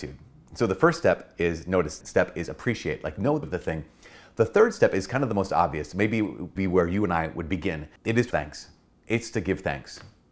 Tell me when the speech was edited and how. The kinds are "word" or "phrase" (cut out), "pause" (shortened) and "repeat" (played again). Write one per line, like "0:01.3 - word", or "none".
0:02.0 - word
0:03.4 - word
0:06.6 - word
0:08.3 - word